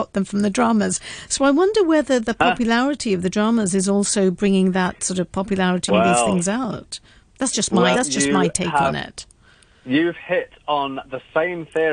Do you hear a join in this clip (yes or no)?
yes